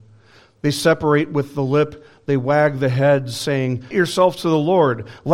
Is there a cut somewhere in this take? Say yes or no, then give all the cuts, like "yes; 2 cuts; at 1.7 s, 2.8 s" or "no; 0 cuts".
yes; 1 cut; at 3.9 s